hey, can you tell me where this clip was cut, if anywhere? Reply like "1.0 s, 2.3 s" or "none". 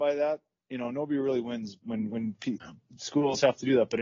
none